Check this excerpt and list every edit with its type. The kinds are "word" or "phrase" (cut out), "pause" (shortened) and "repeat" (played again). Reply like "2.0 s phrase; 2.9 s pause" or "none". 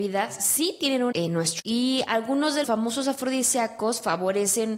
1.1 s word; 1.6 s word; 2.6 s word